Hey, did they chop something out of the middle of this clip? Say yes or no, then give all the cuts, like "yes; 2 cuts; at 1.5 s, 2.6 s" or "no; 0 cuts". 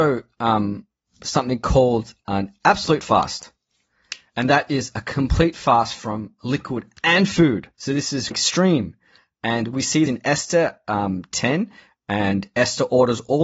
yes; 4 cuts; at 1.2 s, 7.7 s, 8.3 s, 10.1 s